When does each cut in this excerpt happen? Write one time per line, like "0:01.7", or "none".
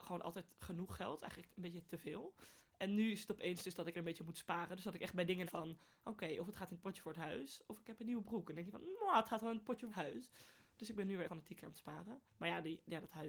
0:03.9
0:05.5
0:09.9
0:11.3
0:12.3